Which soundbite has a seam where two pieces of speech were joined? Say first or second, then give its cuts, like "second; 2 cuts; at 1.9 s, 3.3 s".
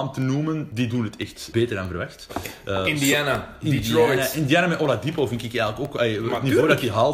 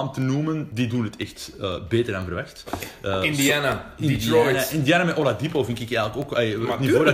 first; 1 cut; at 1.5 s